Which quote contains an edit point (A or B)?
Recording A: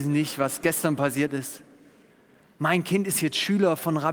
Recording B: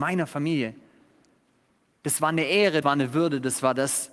B